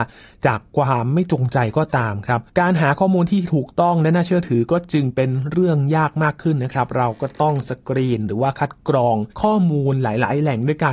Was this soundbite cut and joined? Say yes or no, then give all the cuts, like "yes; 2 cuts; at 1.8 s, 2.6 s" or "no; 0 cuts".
yes; 2 cuts; at 2.5 s, 9.3 s